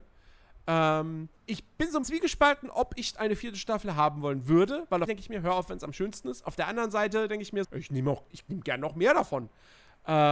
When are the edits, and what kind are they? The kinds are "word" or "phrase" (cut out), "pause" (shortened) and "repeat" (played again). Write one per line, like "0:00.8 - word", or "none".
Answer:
0:01.4 - pause
0:02.0 - word
0:05.1 - phrase
0:07.6 - word